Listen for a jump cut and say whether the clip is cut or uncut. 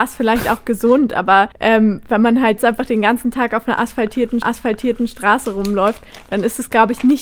cut